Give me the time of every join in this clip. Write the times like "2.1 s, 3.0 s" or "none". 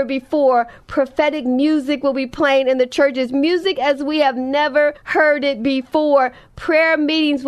5.0 s